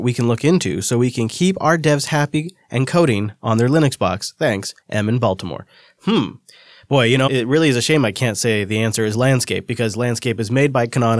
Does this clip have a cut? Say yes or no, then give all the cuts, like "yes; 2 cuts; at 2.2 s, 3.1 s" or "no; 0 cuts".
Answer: yes; 2 cuts; at 4.8 s, 7.3 s